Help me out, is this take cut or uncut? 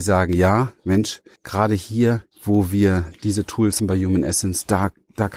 cut